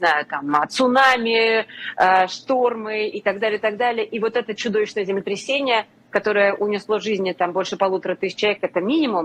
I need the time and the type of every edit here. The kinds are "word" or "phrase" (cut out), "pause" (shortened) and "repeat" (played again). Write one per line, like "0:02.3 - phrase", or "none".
none